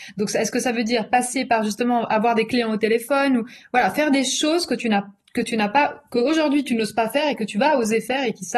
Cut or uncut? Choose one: uncut